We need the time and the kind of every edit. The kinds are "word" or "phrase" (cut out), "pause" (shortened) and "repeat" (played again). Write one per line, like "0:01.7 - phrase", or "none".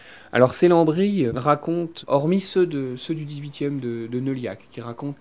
0:01.3 - word
0:02.0 - word